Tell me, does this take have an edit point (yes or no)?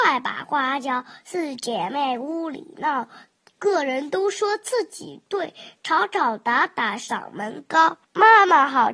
yes